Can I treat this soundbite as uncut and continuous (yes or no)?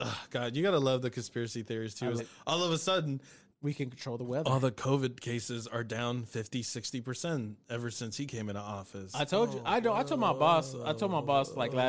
no